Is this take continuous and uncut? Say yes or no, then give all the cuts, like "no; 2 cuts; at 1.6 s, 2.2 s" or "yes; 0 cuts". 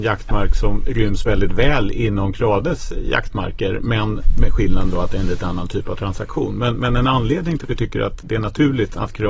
no; 1 cut; at 7.6 s